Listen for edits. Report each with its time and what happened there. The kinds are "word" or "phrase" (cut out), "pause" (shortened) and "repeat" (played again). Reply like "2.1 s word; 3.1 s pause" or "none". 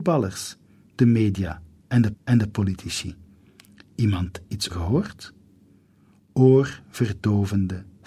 2.1 s repeat; 4.7 s word